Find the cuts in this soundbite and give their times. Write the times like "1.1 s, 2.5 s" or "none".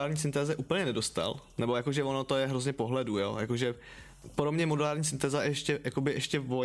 none